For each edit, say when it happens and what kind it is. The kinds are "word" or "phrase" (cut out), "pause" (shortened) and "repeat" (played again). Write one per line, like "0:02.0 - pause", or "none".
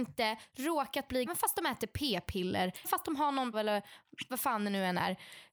0:01.3 - word
0:02.8 - word
0:03.5 - word